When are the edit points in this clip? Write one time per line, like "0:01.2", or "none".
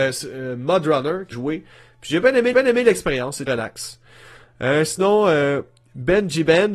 0:01.3
0:02.5
0:03.5